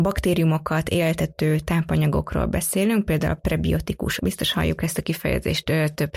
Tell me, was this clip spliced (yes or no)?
yes